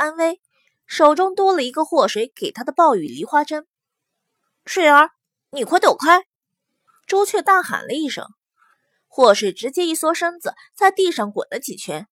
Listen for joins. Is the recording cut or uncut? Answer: uncut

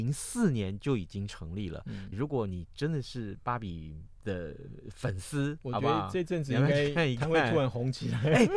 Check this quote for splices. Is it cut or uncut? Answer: cut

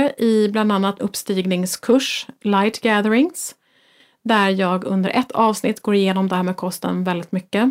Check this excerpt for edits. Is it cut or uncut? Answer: cut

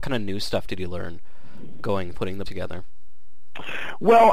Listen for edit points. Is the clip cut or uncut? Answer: cut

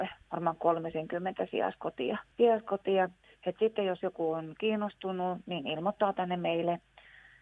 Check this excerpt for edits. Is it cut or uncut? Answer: cut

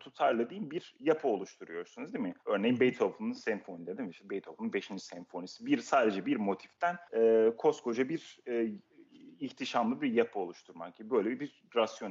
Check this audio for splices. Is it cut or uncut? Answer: cut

